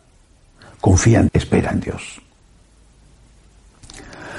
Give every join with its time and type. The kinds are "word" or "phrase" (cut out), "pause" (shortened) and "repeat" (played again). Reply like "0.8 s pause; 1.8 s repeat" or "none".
1.3 s word